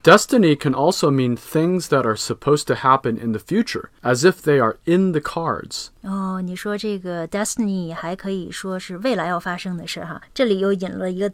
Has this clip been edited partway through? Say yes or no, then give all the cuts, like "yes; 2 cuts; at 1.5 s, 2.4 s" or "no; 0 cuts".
no; 0 cuts